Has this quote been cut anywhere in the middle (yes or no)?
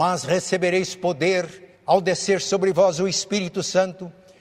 yes